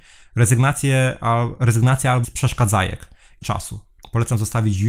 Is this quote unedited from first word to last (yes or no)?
no